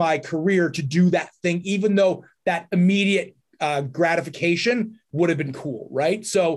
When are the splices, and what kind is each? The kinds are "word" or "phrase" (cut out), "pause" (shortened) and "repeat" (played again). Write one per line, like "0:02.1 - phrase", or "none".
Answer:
none